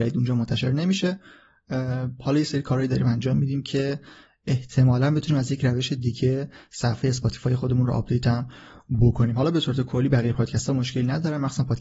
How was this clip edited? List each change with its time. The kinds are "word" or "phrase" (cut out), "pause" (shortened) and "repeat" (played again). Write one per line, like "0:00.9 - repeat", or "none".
none